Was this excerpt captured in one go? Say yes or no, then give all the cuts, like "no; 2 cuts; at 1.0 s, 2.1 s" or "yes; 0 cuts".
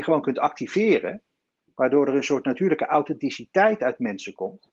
yes; 0 cuts